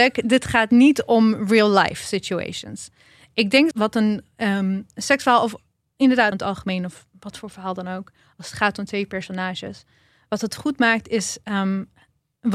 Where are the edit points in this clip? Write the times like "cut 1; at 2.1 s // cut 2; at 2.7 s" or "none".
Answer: cut 1; at 3.7 s // cut 2; at 6.3 s

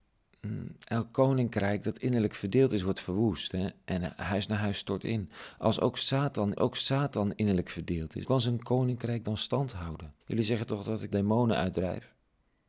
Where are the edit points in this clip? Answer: cut 1; at 6.6 s // cut 2; at 8.2 s // cut 3; at 10.2 s // cut 4; at 11.1 s

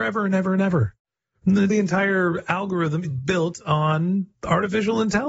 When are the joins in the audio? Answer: cut 1; at 1.7 s // cut 2; at 3.0 s // cut 3; at 4.3 s

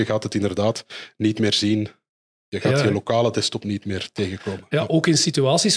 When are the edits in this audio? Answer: none

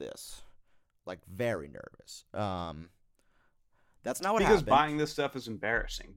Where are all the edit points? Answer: none

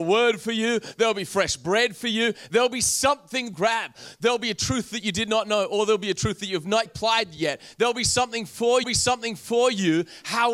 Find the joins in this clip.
cut 1; at 3.5 s // cut 2; at 6.9 s // cut 3; at 8.8 s

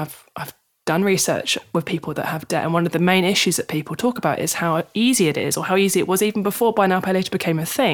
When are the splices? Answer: none

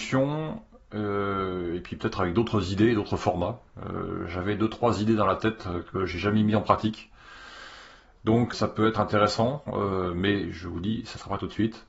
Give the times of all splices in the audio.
cut 1; at 8.5 s

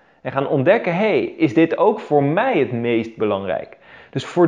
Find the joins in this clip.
none

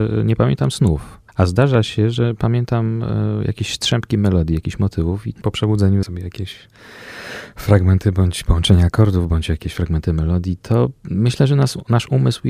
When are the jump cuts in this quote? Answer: cut 1; at 1.3 s // cut 2; at 6.0 s // cut 3; at 11.0 s

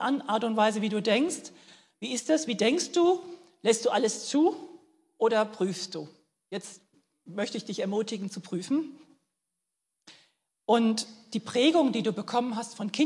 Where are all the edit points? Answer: none

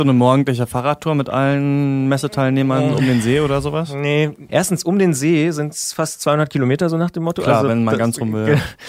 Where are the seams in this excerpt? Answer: cut 1; at 4.5 s

